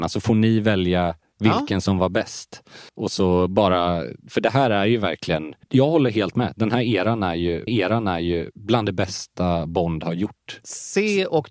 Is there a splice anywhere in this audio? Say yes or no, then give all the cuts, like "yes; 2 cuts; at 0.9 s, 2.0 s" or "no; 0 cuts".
yes; 3 cuts; at 2.9 s, 5.6 s, 7.7 s